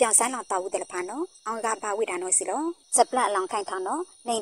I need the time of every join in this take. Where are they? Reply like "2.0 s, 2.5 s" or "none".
none